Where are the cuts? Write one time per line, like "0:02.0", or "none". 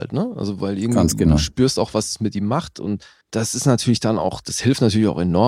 0:03.2